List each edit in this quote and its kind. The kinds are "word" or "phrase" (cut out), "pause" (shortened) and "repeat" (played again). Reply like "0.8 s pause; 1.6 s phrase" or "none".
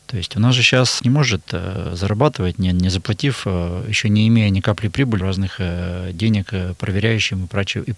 1.0 s word; 5.2 s phrase